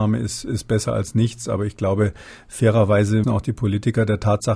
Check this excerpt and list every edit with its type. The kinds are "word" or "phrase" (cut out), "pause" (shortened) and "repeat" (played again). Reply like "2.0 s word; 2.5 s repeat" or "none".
3.2 s word